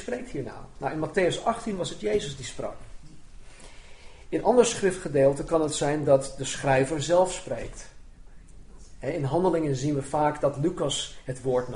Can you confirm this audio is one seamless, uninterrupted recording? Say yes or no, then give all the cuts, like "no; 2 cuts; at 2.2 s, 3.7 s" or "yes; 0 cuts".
yes; 0 cuts